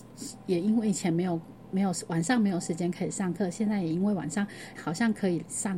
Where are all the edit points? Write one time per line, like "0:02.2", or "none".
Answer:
0:04.8